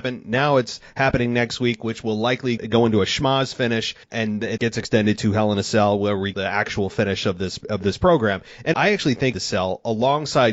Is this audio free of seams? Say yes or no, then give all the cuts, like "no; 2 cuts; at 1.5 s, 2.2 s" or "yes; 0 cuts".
no; 6 cuts; at 2.6 s, 4.0 s, 4.6 s, 6.3 s, 8.7 s, 9.3 s